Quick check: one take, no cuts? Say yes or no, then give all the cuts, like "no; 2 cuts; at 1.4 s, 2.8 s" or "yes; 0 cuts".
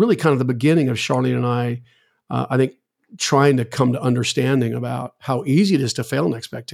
yes; 0 cuts